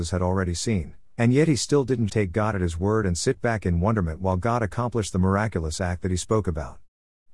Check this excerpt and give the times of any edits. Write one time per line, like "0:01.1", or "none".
0:02.1